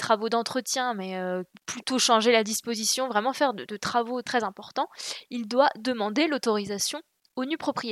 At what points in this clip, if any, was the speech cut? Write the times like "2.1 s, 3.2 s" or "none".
4.2 s

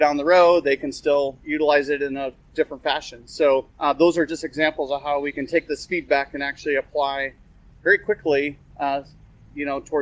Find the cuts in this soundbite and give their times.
3.7 s

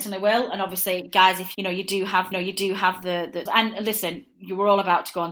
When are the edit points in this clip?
1.5 s, 2.3 s, 3.5 s

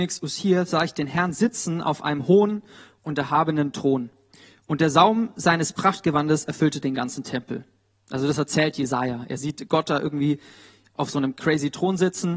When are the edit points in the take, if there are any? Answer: none

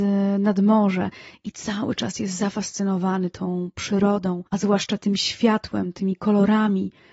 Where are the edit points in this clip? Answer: 4.5 s

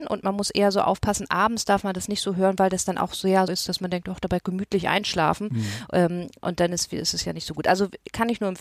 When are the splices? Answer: 3.5 s, 4.4 s

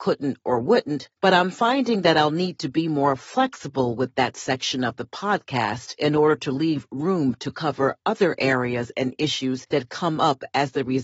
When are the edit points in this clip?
1.1 s

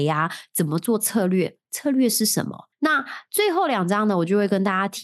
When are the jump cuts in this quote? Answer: 2.7 s

